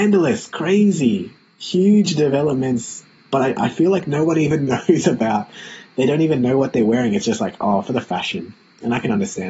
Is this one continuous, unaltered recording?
no; 1 cut; at 1.4 s

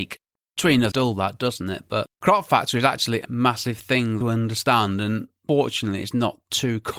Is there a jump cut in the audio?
yes; 4 cuts; at 0.9 s, 2.1 s, 3.2 s, 4.2 s

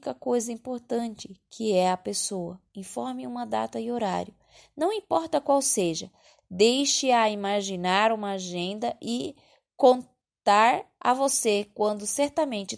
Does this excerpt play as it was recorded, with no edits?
yes; 0 cuts

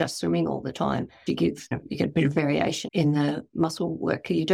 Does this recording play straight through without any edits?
no; 3 cuts; at 1.3 s, 1.7 s, 2.9 s

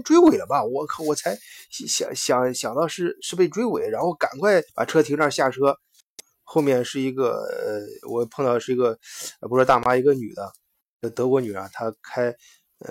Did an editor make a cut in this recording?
yes; 1 cut; at 4.7 s

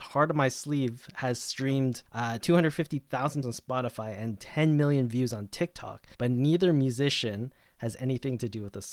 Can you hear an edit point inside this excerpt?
yes; 3 cuts; at 2.1 s, 3.4 s, 6.1 s

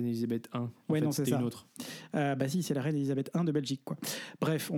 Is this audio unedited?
yes; 0 cuts

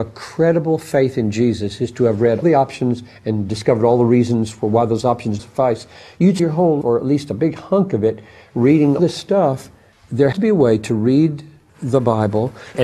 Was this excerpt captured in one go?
no; 6 cuts; at 2.4 s, 5.4 s, 6.4 s, 6.8 s, 9.0 s, 10.3 s

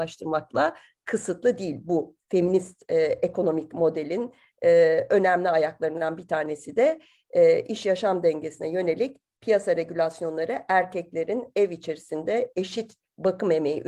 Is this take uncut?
yes; 0 cuts

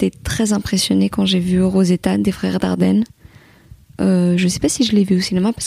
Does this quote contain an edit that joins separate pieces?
no; 0 cuts

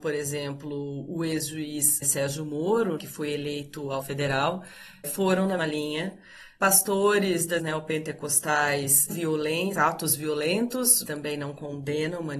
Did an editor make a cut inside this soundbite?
yes; 8 cuts; at 2.0 s, 3.0 s, 4.0 s, 5.0 s, 5.6 s, 7.6 s, 9.1 s, 11.1 s

